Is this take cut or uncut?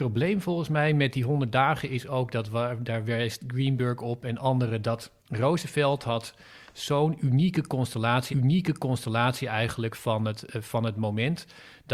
cut